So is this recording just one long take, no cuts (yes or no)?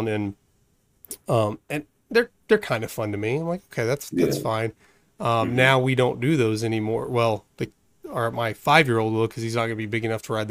yes